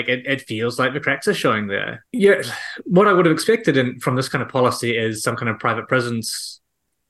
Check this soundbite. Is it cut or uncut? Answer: uncut